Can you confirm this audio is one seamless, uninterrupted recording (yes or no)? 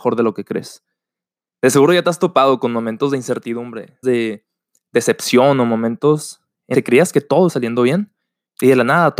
no